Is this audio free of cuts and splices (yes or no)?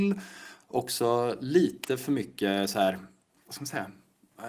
yes